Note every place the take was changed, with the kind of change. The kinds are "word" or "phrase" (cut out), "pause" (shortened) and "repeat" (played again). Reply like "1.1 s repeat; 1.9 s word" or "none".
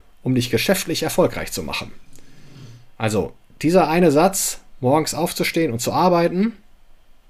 none